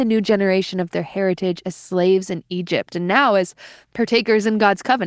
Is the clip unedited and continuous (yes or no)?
yes